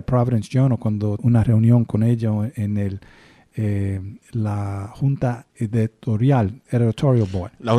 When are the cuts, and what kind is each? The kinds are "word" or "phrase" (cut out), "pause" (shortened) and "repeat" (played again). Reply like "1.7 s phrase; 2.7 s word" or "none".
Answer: 1.2 s word; 4.2 s pause; 5.5 s pause